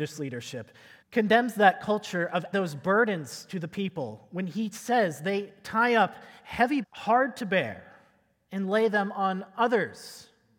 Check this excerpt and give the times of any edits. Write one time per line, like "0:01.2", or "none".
0:01.0
0:02.5
0:06.8